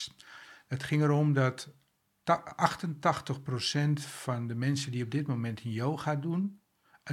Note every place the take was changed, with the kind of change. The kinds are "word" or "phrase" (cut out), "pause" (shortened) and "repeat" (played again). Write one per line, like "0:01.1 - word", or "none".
none